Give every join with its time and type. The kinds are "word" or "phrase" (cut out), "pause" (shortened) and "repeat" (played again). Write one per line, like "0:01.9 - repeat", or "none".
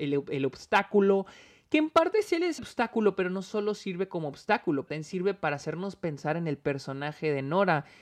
0:02.6 - word
0:04.9 - word